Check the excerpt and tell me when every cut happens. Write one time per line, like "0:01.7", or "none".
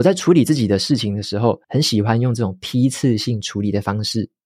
0:01.6

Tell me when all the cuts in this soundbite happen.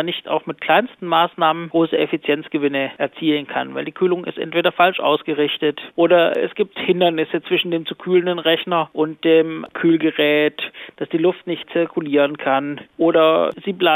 none

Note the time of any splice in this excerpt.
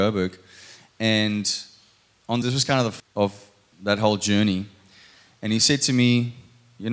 0:02.4
0:03.0

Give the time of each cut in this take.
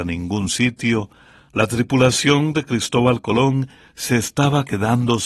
none

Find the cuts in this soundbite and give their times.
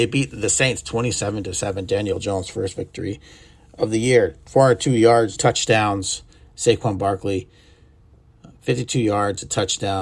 0:05.4

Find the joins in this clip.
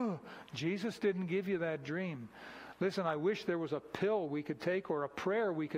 none

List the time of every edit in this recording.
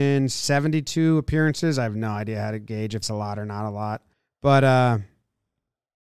0:03.0
0:04.1

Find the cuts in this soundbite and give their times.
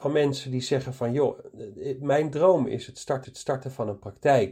0:03.2

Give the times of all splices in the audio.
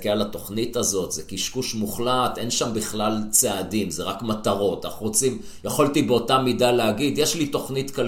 none

